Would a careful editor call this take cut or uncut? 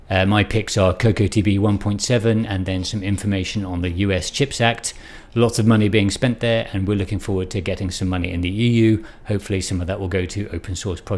uncut